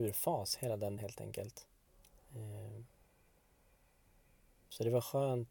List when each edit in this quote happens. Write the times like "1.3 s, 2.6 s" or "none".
1.0 s, 1.9 s